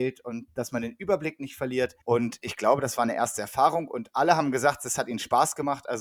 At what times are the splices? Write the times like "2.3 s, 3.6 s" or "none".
2.0 s